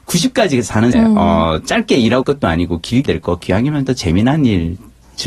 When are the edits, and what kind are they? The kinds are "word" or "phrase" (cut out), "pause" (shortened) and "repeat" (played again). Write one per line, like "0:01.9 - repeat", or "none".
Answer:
0:00.9 - word
0:02.2 - word
0:03.1 - word
0:03.9 - word